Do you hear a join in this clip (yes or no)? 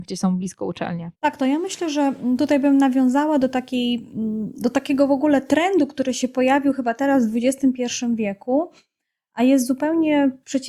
yes